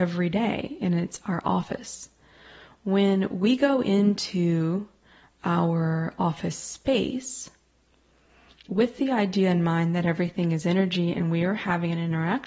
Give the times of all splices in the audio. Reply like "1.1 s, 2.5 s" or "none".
none